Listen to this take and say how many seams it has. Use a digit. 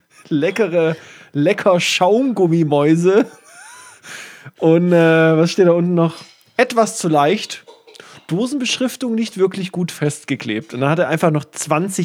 0